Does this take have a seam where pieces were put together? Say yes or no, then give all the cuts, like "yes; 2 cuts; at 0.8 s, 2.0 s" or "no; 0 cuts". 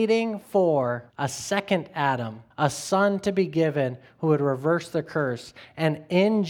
yes; 2 cuts; at 1.1 s, 2.5 s